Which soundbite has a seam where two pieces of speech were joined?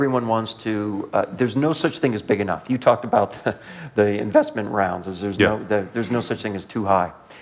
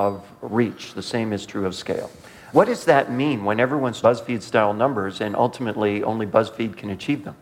second; 2 cuts; at 2.5 s, 4.0 s

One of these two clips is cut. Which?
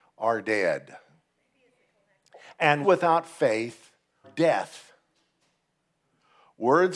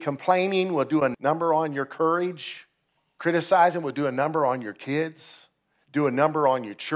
first; 2 cuts; at 2.8 s, 4.2 s

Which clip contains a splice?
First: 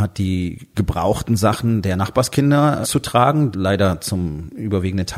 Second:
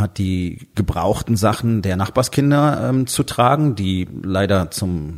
first; 2 cuts; at 2.8 s, 3.5 s

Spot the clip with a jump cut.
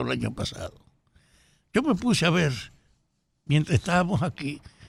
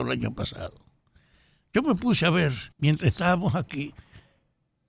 second; 1 cut; at 2.7 s

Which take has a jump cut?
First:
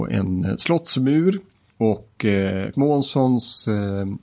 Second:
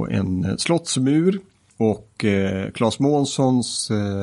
first; 1 cut; at 2.7 s

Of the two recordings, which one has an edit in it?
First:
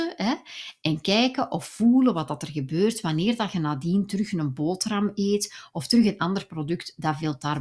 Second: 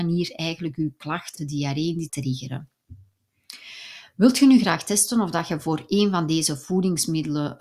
second; 2 cuts; at 1.4 s, 2.1 s

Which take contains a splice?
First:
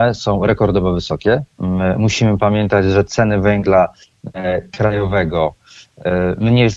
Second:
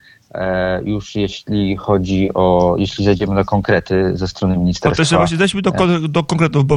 first; 1 cut; at 1.5 s

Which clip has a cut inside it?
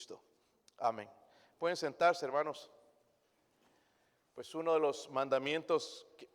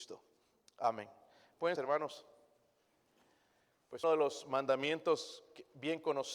second; 2 cuts; at 1.8 s, 4.0 s

